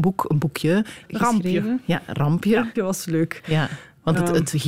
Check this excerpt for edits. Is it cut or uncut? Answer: cut